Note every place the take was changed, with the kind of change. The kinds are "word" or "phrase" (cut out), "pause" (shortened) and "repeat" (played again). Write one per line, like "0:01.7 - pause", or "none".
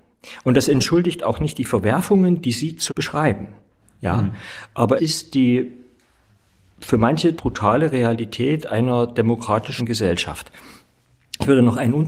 0:02.9 - word
0:05.0 - word
0:07.4 - word
0:09.8 - word